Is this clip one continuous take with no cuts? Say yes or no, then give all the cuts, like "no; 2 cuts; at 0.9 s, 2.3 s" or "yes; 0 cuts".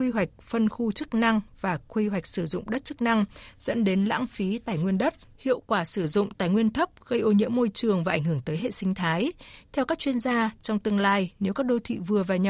yes; 0 cuts